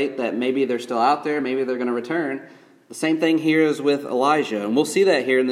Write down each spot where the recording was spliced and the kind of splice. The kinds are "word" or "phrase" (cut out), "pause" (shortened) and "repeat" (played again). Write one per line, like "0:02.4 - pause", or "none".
none